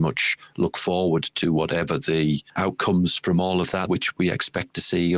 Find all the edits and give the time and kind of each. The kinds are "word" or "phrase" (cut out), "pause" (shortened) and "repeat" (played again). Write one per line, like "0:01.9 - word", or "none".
0:02.6 - word
0:03.9 - word